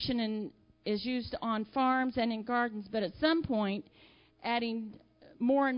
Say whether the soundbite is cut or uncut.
uncut